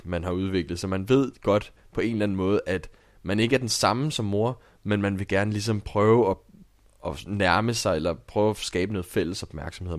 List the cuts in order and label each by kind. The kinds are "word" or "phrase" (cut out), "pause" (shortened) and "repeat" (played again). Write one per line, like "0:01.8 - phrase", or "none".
none